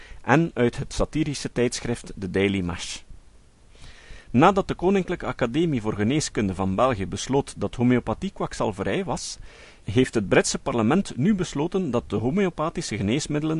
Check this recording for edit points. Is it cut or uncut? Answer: uncut